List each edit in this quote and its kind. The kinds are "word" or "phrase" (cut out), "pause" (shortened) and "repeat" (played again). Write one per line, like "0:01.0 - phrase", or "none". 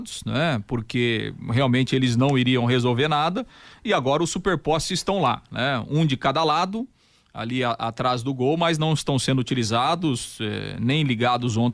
none